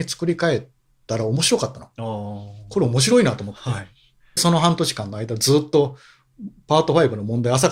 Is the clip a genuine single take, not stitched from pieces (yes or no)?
no